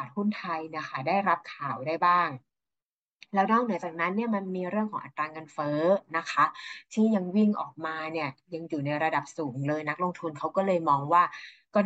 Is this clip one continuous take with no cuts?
yes; 0 cuts

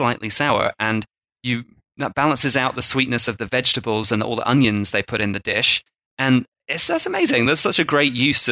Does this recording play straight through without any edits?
yes; 0 cuts

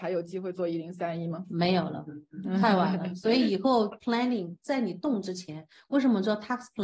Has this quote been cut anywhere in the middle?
no; 0 cuts

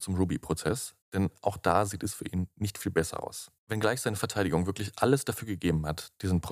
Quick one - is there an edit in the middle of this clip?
yes; 2 cuts; at 1.0 s, 3.6 s

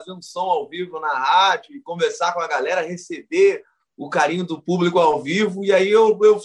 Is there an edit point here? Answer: no; 0 cuts

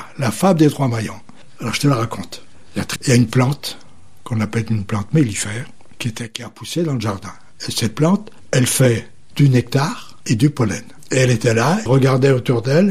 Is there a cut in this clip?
yes; 2 cuts; at 3.0 s, 11.9 s

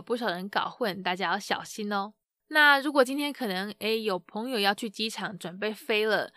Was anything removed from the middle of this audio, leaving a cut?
no; 0 cuts

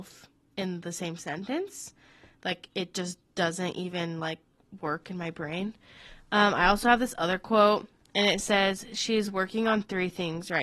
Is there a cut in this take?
no; 0 cuts

